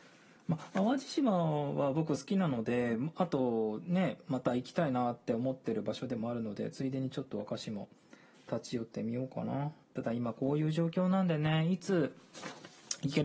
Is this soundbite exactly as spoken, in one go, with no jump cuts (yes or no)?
no